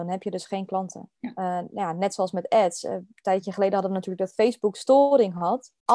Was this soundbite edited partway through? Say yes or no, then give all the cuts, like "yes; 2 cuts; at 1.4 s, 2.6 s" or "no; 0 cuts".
yes; 1 cut; at 1.2 s